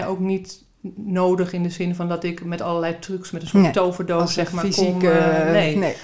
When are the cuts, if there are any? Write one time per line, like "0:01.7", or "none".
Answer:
none